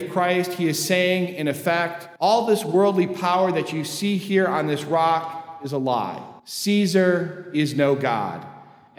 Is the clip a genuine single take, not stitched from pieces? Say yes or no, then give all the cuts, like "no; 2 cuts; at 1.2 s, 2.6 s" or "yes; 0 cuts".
no; 2 cuts; at 2.2 s, 6.4 s